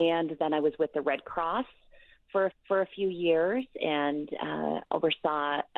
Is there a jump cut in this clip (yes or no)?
yes